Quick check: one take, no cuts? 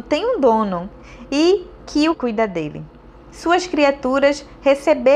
no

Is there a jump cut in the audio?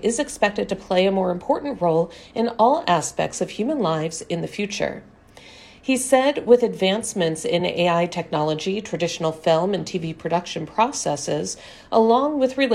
no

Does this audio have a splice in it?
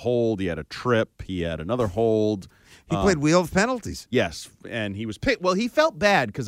no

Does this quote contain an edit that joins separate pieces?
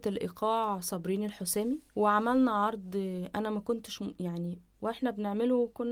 yes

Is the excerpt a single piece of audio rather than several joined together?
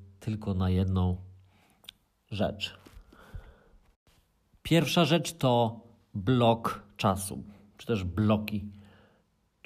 yes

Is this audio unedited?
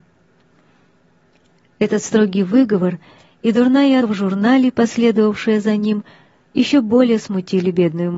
no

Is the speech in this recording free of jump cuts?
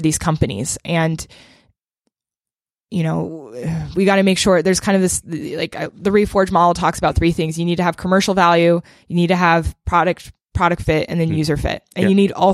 yes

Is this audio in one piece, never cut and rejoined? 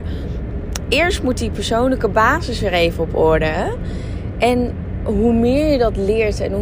yes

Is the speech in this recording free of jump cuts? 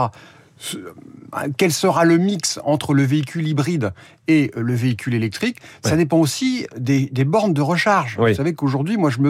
yes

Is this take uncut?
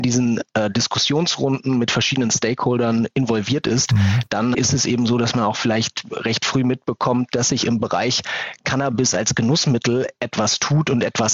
no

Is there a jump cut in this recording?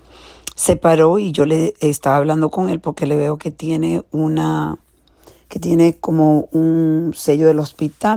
no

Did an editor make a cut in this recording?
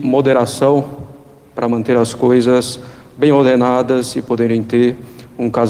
no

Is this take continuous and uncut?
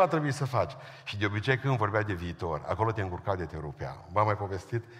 yes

